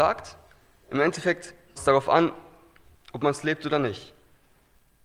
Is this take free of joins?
no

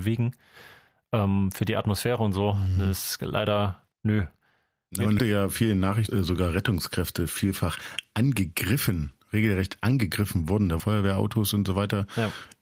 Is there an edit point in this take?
yes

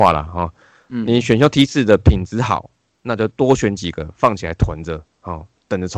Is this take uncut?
yes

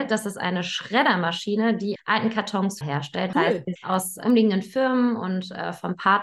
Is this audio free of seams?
no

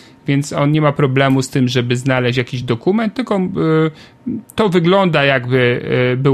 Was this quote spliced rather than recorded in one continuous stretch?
no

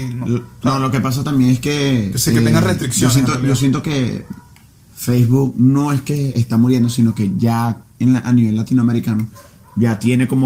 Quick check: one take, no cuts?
yes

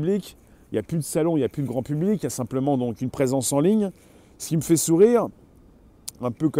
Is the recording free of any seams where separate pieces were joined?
yes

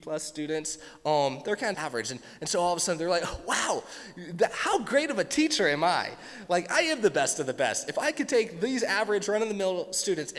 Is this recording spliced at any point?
yes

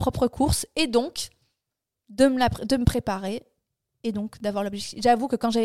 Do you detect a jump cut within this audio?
no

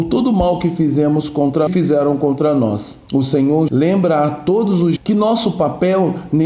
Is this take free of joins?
no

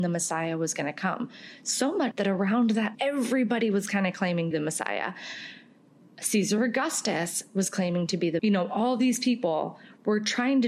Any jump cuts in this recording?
yes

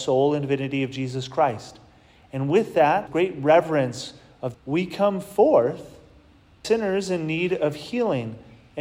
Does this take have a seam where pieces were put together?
yes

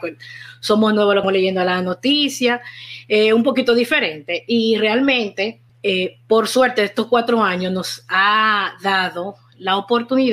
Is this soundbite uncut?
no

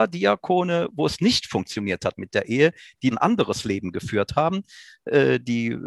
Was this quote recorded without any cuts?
no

